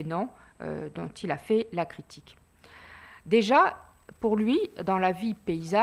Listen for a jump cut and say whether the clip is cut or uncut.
uncut